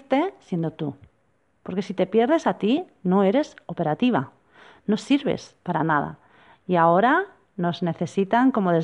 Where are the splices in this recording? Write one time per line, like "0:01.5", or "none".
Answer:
none